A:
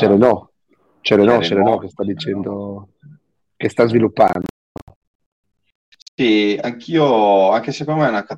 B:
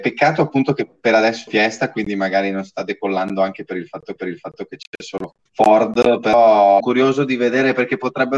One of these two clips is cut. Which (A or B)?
B